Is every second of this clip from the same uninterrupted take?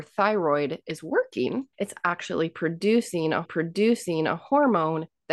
no; 2 cuts; at 1.7 s, 3.4 s

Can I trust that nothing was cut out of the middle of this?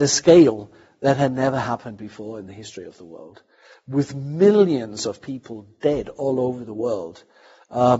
yes; 0 cuts

